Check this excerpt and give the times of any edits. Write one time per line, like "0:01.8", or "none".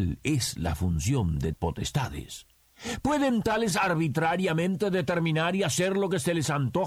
0:01.5
0:03.7

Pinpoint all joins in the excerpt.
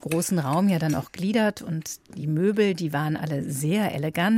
none

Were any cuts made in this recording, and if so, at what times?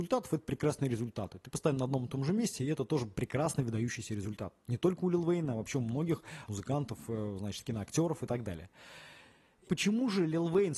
0:06.5
0:09.7

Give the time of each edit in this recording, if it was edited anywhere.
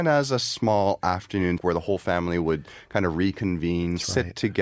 0:01.6

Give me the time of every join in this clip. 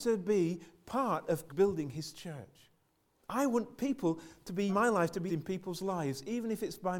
0:01.5
0:03.0
0:04.7
0:05.3

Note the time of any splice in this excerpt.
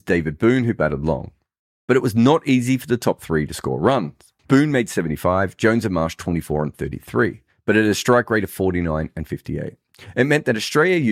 0:04.4

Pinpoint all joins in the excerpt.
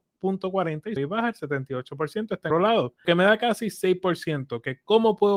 0:01.0
0:02.5
0:03.0

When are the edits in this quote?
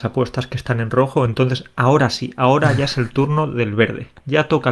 none

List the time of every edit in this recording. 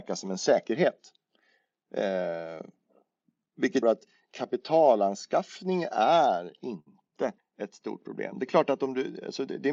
0:03.8
0:07.4

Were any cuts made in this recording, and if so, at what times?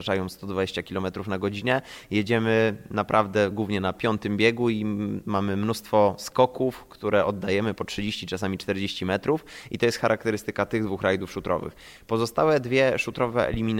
none

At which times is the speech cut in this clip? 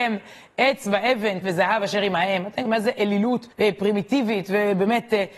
0:01.4
0:02.7
0:03.5

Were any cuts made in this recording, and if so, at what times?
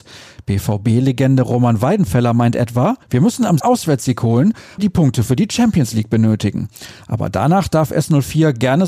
0:03.0
0:03.6
0:04.8

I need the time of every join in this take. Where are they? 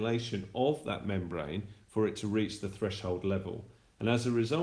none

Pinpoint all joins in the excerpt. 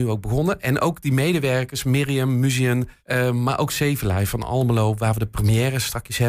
0:03.0

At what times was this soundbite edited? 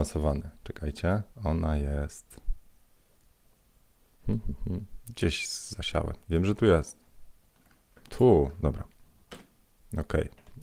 0:01.3
0:06.2
0:08.6

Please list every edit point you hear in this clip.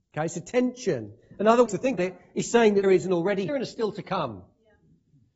0:01.7
0:02.0
0:02.8
0:03.5

